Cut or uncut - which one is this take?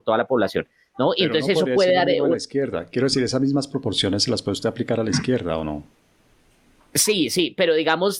uncut